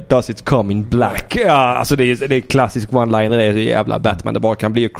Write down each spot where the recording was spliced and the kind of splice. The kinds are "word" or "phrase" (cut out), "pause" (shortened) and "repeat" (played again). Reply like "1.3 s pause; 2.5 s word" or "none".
none